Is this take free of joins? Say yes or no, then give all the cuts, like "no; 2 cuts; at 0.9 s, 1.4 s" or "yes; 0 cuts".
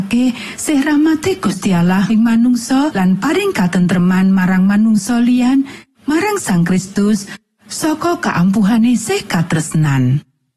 no; 2 cuts; at 2.1 s, 2.9 s